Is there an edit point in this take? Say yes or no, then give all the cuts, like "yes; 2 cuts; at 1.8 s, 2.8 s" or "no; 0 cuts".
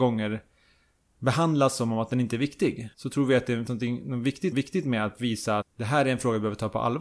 yes; 4 cuts; at 2.9 s, 3.7 s, 4.5 s, 5.6 s